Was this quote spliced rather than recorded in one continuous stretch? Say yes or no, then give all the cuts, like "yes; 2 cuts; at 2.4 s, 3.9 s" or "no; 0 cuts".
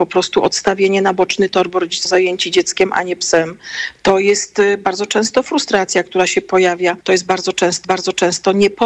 yes; 3 cuts; at 2.1 s, 7.0 s, 7.8 s